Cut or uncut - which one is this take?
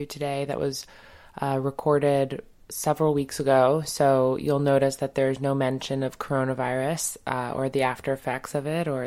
uncut